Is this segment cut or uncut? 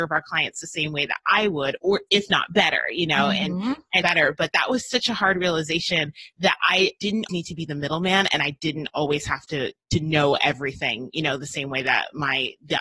cut